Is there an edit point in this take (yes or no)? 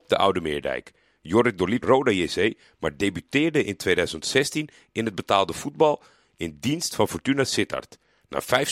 yes